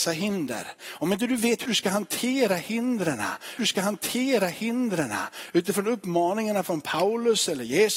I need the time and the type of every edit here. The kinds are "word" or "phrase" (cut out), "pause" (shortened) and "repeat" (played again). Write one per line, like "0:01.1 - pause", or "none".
0:01.7 - word
0:03.6 - repeat